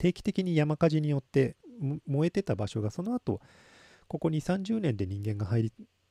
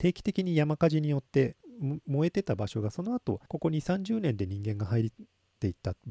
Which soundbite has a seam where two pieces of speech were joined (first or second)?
second